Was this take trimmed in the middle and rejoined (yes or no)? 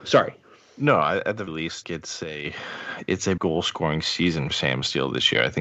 yes